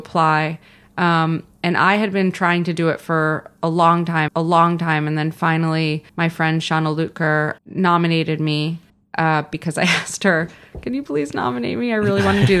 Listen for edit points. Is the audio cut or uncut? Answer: cut